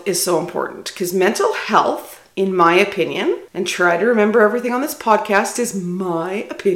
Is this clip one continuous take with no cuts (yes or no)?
no